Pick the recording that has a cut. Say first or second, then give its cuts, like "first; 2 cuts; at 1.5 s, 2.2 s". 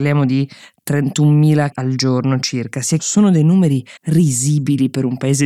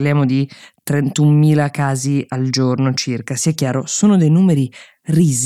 first; 3 cuts; at 1.7 s, 3.0 s, 4.0 s